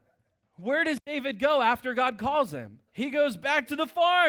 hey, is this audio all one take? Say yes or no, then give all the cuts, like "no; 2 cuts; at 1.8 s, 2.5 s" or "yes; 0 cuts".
no; 1 cut; at 2.9 s